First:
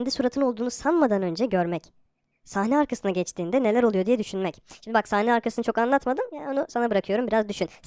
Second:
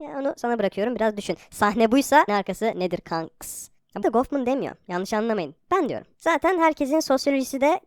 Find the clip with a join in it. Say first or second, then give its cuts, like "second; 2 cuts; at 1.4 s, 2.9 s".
second; 2 cuts; at 2.3 s, 4.0 s